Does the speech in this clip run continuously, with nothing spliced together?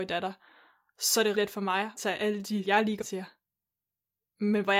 no; 4 cuts; at 1.3 s, 2.0 s, 2.6 s, 3.0 s

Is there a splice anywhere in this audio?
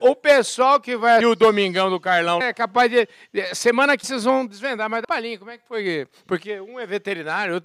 yes; 4 cuts; at 1.2 s, 2.4 s, 4.0 s, 5.0 s

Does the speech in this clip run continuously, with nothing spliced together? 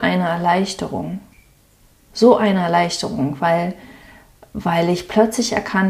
yes; 0 cuts

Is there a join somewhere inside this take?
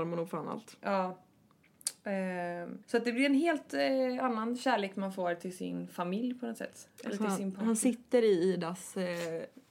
yes; 1 cut; at 2.8 s

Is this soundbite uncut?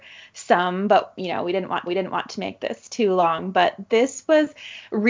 no; 1 cut; at 1.9 s

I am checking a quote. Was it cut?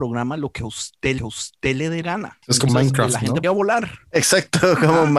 yes; 4 cuts; at 1.2 s, 2.0 s, 2.7 s, 3.4 s

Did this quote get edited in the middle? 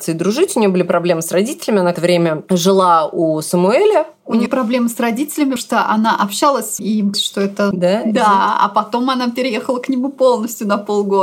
yes; 6 cuts; at 1.9 s, 4.5 s, 5.6 s, 6.8 s, 7.1 s, 7.7 s

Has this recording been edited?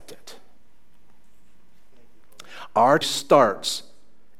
yes; 1 cut; at 3.0 s

